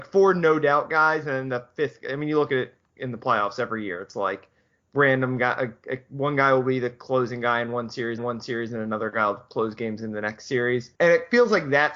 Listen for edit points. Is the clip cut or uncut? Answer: cut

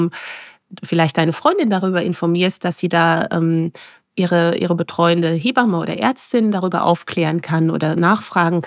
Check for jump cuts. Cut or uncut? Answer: uncut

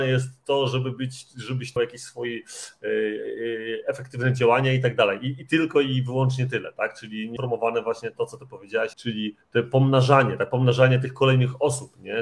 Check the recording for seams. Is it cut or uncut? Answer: cut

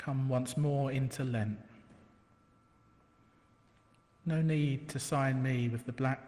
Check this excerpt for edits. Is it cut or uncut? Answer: uncut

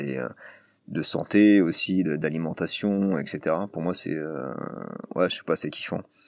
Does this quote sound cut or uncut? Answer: uncut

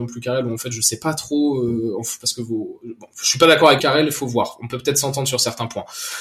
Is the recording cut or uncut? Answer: cut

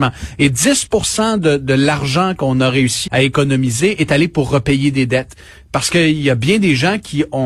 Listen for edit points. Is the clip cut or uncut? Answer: cut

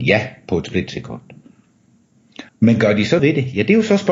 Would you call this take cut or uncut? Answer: cut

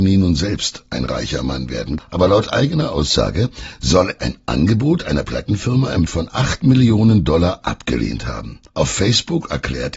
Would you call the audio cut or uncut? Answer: cut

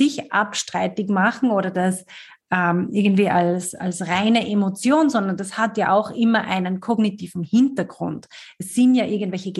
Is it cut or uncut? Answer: uncut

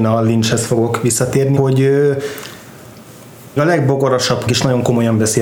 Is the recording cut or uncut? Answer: cut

